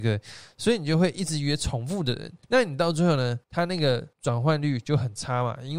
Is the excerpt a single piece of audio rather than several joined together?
no; 3 cuts; at 2.4 s, 3.4 s, 4.1 s

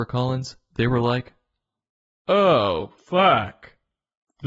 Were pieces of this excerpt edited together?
yes; 1 cut; at 3.0 s

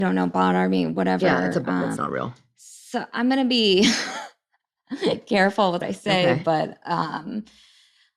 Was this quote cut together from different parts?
yes; 2 cuts; at 2.0 s, 5.8 s

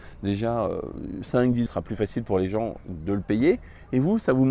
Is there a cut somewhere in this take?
yes; 1 cut; at 1.7 s

